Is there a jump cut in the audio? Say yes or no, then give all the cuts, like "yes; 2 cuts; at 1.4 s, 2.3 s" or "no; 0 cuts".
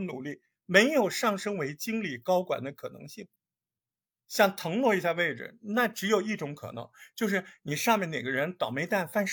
no; 0 cuts